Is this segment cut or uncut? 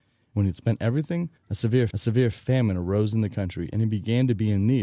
cut